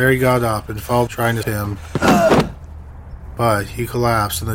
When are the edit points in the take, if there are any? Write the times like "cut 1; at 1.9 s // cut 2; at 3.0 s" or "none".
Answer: cut 1; at 1.1 s // cut 2; at 1.4 s